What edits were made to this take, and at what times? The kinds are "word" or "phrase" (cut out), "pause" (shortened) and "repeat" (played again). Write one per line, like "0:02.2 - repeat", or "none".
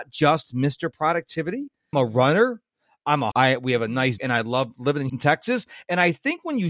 0:01.9 - word
0:03.3 - word
0:04.2 - word
0:05.1 - word